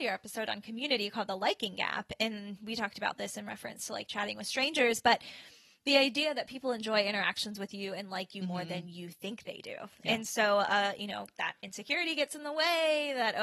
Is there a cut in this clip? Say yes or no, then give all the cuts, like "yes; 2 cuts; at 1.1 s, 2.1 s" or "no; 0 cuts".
no; 0 cuts